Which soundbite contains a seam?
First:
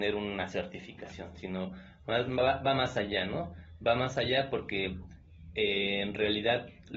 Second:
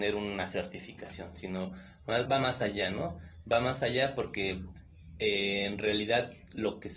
second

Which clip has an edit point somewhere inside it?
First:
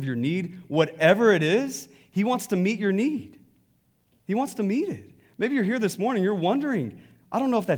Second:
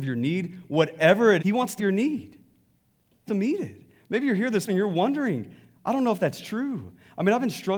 second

